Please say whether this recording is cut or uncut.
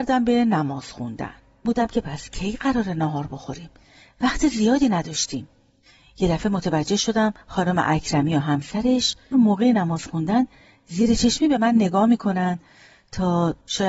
cut